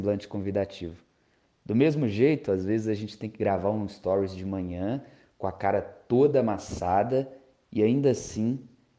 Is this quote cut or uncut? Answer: uncut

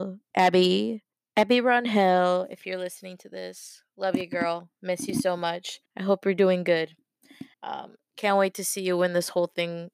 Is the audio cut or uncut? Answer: cut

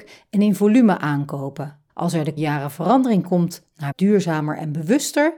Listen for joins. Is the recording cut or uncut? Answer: cut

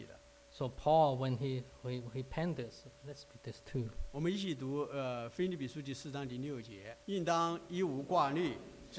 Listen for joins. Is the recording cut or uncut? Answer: cut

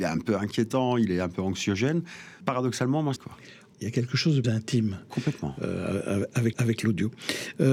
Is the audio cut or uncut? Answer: cut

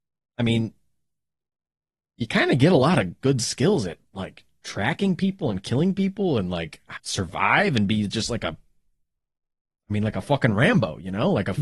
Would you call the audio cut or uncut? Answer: cut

